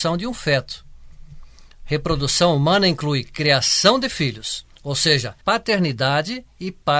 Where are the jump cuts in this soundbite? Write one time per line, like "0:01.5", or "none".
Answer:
0:04.7
0:05.4